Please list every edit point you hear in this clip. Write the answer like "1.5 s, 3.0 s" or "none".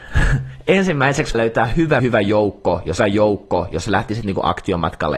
1.3 s, 2.0 s, 3.0 s

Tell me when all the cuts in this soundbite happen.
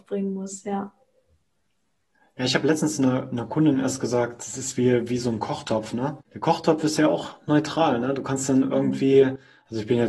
6.2 s

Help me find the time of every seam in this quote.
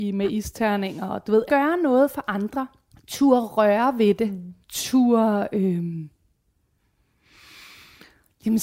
1.5 s, 2.9 s, 4.6 s

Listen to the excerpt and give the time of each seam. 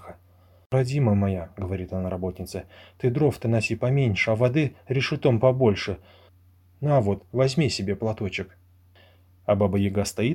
none

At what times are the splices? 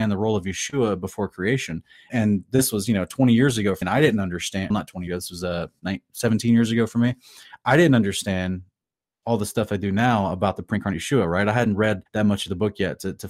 2.1 s, 3.8 s, 4.7 s, 5.1 s, 12.1 s

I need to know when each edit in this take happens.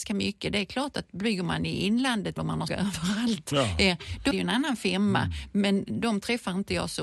2.4 s, 2.7 s, 4.3 s

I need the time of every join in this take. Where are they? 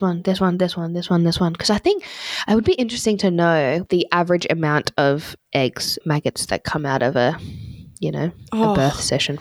6.0 s

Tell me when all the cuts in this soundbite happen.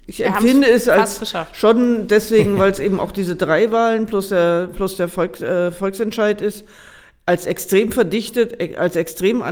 none

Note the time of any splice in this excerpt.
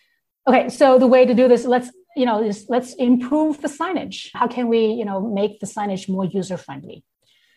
4.3 s

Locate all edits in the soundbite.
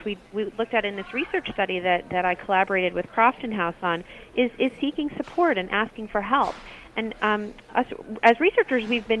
none

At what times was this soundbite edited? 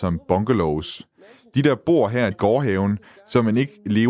2.3 s

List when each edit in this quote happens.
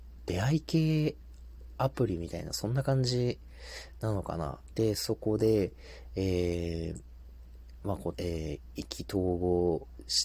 8.1 s

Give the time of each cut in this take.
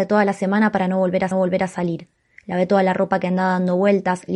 1.3 s

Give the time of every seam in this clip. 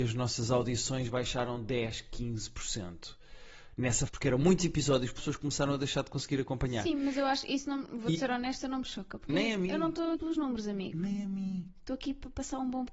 4.1 s, 5.2 s, 10.1 s

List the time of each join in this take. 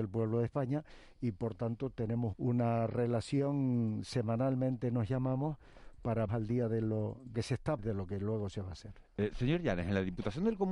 2.3 s, 6.3 s, 7.3 s, 7.8 s

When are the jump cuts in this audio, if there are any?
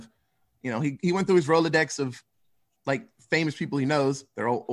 none

